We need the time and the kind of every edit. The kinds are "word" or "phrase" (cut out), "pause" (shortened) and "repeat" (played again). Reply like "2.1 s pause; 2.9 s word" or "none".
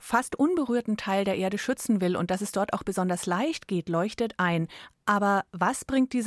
none